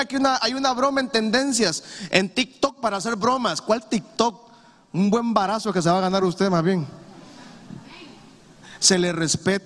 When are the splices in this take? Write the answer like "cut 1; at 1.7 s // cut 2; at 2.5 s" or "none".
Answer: none